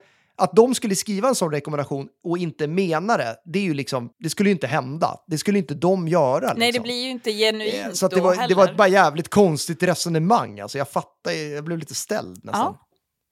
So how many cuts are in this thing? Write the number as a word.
one